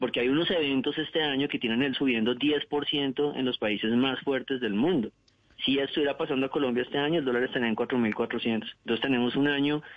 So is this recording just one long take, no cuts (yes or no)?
no